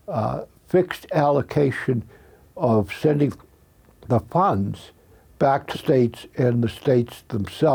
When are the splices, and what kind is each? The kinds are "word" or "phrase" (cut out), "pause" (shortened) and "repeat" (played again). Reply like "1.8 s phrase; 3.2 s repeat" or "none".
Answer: 5.7 s word